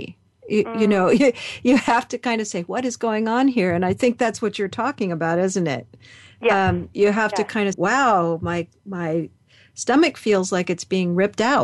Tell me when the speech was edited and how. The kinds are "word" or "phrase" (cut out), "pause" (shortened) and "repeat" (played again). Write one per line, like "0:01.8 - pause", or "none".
0:06.9 - word
0:07.7 - word